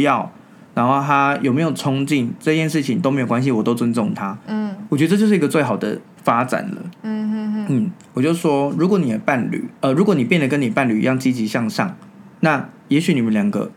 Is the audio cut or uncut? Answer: cut